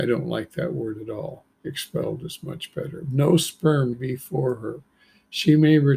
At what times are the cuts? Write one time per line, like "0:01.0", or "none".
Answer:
0:01.5
0:03.9

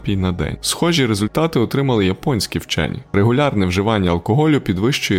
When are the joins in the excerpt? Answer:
none

